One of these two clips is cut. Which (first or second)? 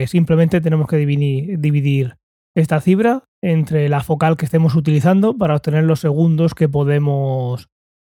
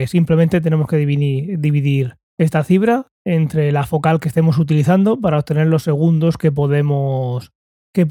second